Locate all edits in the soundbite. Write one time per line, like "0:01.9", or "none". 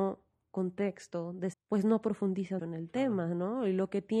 0:01.5
0:02.6